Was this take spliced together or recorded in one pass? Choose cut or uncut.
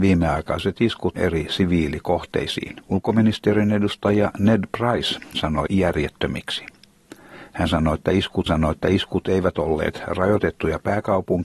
cut